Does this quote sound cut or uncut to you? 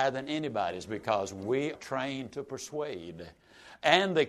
cut